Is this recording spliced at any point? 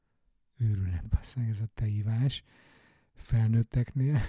no; 0 cuts

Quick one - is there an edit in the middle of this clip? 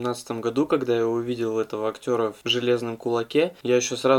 no; 0 cuts

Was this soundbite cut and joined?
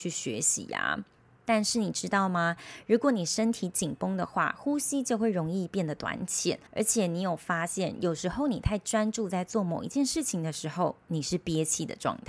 yes; 2 cuts; at 1.2 s, 6.7 s

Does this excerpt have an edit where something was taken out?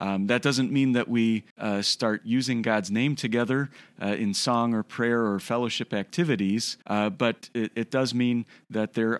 yes; 2 cuts; at 1.5 s, 6.8 s

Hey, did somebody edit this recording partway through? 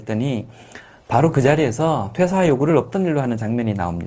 no; 0 cuts

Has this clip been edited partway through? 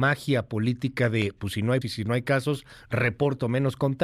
yes; 1 cut; at 1.8 s

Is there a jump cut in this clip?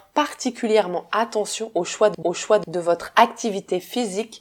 yes; 1 cut; at 2.2 s

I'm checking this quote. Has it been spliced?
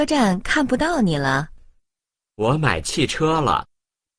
no; 0 cuts

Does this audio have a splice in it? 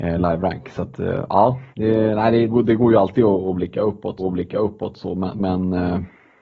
yes; 3 cuts; at 1.7 s, 2.5 s, 4.2 s

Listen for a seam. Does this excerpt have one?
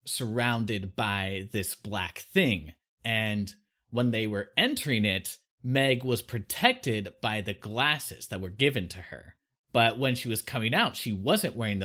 no; 0 cuts

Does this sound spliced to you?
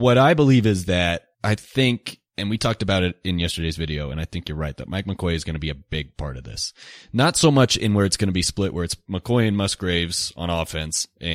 yes; 2 cuts; at 1.3 s, 2.3 s

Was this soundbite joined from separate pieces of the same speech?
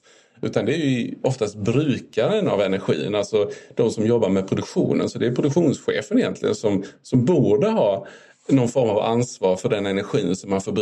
no; 0 cuts

